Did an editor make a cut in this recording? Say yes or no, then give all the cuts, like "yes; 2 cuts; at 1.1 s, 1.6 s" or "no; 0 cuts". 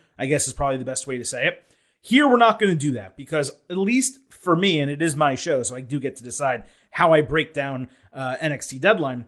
no; 0 cuts